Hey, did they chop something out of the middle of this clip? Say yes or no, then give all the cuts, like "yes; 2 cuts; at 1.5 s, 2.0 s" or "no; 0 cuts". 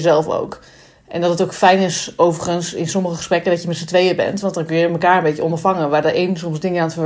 no; 0 cuts